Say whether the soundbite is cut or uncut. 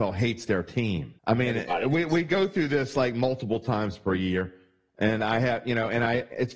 cut